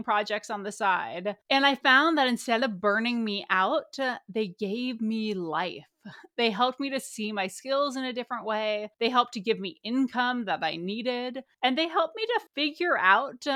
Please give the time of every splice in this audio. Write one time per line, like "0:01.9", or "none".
0:01.4
0:08.9
0:11.5
0:12.5